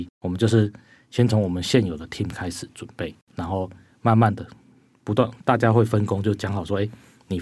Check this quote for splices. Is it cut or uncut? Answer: uncut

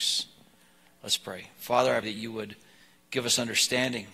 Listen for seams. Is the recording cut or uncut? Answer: cut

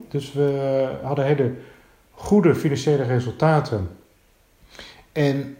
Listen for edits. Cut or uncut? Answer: uncut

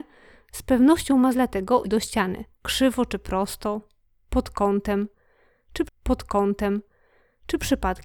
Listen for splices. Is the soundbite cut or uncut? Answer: cut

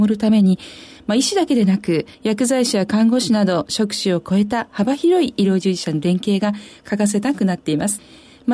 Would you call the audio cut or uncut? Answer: cut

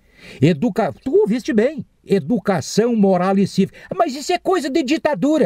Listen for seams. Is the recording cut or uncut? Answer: uncut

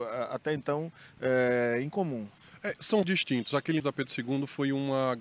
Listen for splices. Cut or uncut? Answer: cut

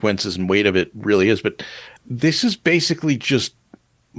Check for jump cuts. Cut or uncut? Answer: cut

